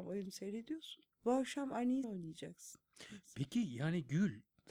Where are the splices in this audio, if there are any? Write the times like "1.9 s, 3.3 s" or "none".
1.1 s, 2.0 s